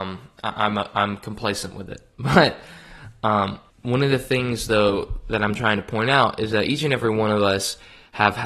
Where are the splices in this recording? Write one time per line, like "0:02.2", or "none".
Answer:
0:03.7